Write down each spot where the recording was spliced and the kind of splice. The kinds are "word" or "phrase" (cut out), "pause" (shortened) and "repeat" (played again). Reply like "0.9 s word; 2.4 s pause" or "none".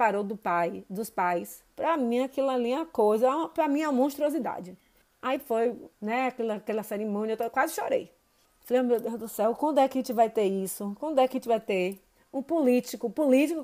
1.7 s pause; 5.0 s pause; 5.9 s pause; 8.4 s pause